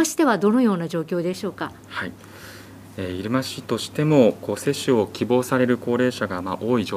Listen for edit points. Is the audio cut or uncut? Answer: cut